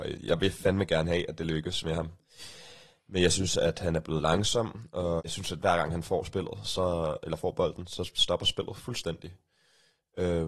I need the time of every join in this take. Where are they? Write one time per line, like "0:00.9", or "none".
0:05.2